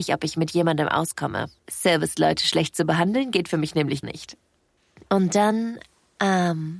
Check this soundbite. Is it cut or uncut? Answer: cut